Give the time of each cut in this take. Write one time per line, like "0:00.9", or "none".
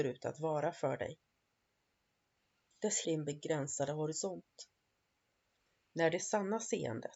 0:03.0